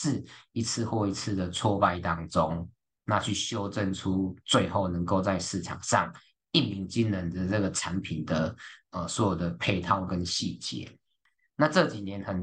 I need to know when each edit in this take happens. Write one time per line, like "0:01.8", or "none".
none